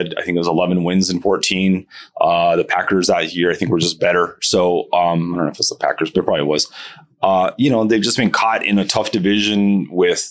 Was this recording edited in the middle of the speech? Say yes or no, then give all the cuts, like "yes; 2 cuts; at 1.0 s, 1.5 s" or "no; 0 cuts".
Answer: no; 0 cuts